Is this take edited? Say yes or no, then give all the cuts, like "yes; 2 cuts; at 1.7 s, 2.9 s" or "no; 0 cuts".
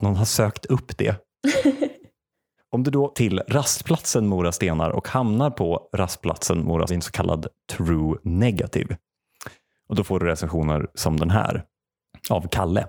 yes; 3 cuts; at 2.6 s, 3.1 s, 6.9 s